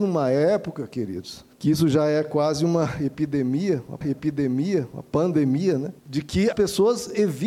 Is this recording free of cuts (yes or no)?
no